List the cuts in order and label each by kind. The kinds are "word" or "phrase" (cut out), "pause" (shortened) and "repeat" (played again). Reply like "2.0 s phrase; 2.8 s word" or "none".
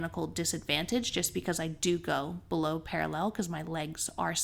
none